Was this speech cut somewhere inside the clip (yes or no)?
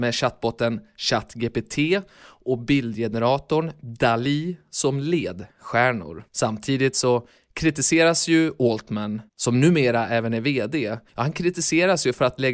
yes